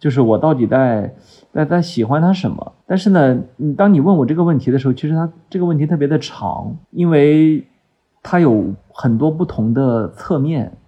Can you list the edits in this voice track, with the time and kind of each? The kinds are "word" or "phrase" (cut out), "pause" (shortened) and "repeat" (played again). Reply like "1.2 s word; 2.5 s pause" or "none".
2.8 s pause; 6.8 s pause